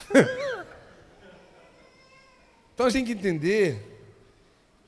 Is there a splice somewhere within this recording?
yes; 1 cut; at 2.9 s

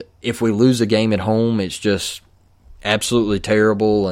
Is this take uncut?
yes; 0 cuts

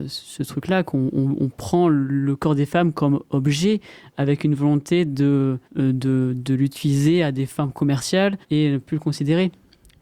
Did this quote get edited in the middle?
yes; 2 cuts; at 5.6 s, 8.4 s

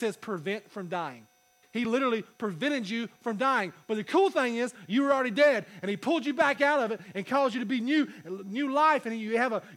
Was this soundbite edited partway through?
no; 0 cuts

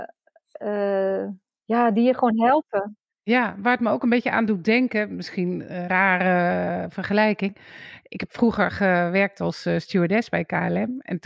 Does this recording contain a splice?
yes; 1 cut; at 5.9 s

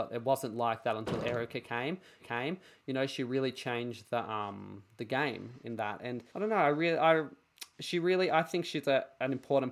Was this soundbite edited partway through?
yes; 2 cuts; at 2.2 s, 6.3 s

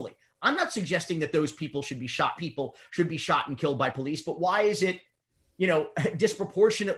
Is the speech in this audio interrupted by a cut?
yes; 1 cut; at 2.4 s

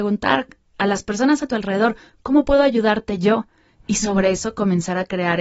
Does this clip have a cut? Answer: no; 0 cuts

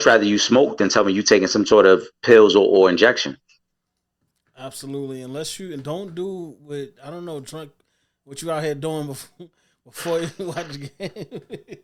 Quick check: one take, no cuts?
yes; 0 cuts

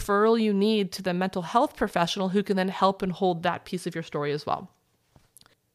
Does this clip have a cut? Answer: no; 0 cuts

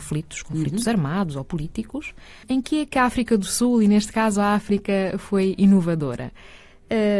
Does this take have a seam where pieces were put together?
no; 0 cuts

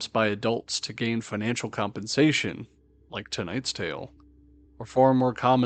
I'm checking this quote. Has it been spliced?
no; 0 cuts

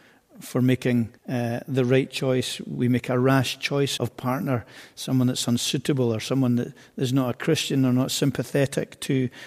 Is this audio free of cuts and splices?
no; 2 cuts; at 1.2 s, 4.0 s

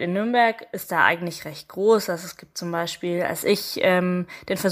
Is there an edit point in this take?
no; 0 cuts

